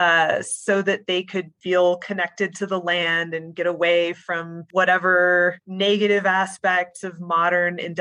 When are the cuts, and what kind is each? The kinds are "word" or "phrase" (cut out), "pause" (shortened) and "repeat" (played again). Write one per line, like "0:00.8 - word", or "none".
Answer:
0:05.6 - pause